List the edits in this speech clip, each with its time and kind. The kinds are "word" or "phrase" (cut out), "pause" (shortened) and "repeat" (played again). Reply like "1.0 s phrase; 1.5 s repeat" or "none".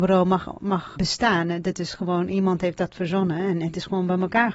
1.0 s word